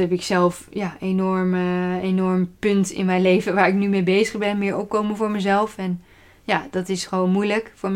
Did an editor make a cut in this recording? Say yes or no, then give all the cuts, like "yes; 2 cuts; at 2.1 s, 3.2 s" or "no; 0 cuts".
no; 0 cuts